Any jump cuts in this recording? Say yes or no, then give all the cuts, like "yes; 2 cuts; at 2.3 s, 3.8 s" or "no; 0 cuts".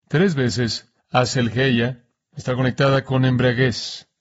yes; 1 cut; at 1.0 s